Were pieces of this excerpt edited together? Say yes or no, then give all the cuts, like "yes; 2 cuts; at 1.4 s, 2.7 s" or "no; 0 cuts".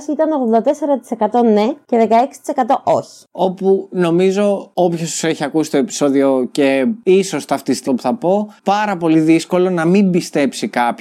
yes; 2 cuts; at 7.9 s, 8.6 s